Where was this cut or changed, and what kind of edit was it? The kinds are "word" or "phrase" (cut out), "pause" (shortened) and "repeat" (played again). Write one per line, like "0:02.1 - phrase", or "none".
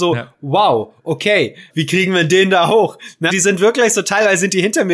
0:01.7 - word
0:03.3 - word